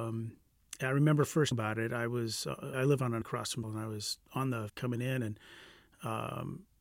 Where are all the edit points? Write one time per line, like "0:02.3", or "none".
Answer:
0:01.5
0:02.7
0:03.2
0:03.6
0:04.3
0:04.7